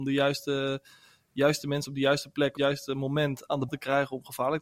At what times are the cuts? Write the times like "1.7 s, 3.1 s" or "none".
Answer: 2.6 s, 3.7 s